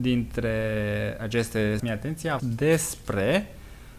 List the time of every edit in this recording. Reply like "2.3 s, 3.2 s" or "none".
1.8 s, 2.4 s

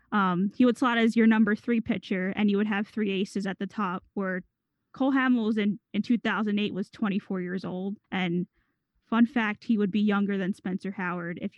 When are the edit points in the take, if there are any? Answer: 8.0 s

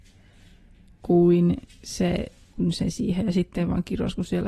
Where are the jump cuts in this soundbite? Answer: 2.5 s, 2.9 s

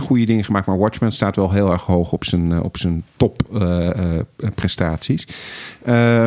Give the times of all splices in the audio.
none

